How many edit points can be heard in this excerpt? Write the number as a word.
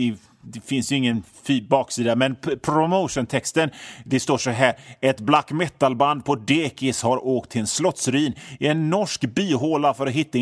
zero